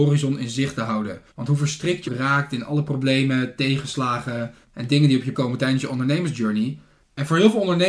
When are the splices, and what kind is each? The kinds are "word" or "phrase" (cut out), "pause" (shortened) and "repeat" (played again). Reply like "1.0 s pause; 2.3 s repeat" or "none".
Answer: 1.3 s pause; 2.1 s word; 4.6 s pause; 5.3 s word